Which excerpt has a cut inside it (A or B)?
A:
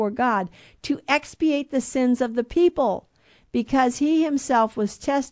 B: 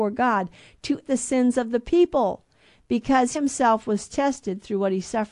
B